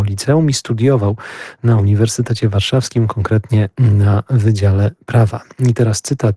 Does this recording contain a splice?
no; 0 cuts

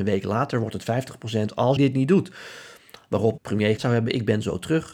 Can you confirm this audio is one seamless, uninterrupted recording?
no; 3 cuts; at 1.8 s, 3.4 s, 3.8 s

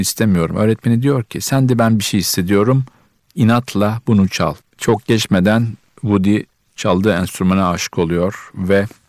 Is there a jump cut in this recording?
no; 0 cuts

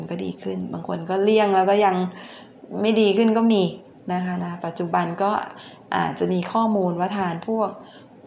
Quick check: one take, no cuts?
yes; 0 cuts

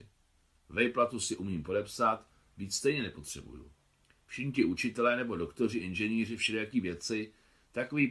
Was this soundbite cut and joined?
no; 0 cuts

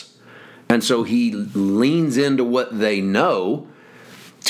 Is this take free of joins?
yes; 0 cuts

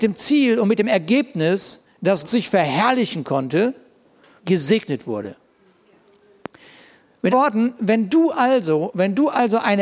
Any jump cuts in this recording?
yes; 3 cuts; at 2.2 s, 4.4 s, 7.3 s

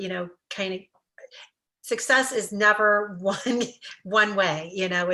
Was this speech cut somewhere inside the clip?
no; 0 cuts

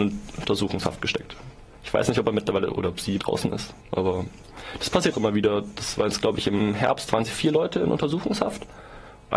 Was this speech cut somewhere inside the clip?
yes; 5 cuts; at 1.7 s, 3.2 s, 3.8 s, 5.1 s, 7.2 s

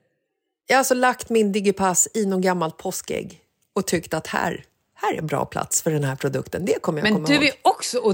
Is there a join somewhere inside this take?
no; 0 cuts

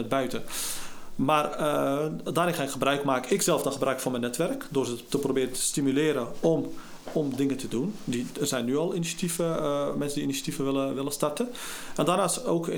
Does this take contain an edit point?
yes; 1 cut; at 7.1 s

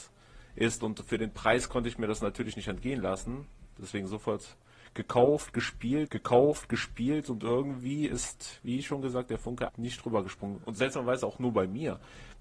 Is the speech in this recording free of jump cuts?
no; 2 cuts; at 6.1 s, 9.7 s

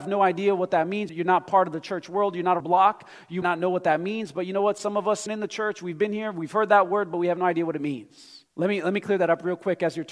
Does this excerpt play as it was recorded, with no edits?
no; 5 cuts; at 1.1 s, 2.6 s, 3.4 s, 5.3 s, 8.5 s

